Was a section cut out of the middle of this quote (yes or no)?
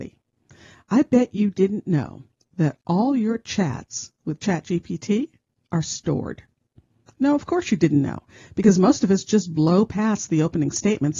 no